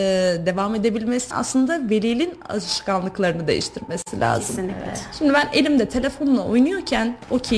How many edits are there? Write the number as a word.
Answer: one